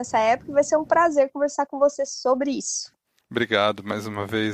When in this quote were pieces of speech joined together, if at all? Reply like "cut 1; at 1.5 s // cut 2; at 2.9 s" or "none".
none